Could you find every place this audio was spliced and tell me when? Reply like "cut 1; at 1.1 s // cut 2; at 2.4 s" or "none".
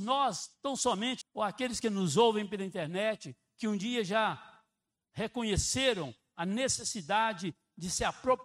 cut 1; at 1.2 s